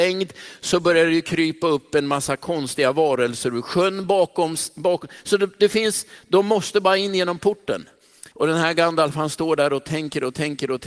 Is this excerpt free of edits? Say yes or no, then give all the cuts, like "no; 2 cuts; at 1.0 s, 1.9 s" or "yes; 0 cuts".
no; 1 cut; at 8.3 s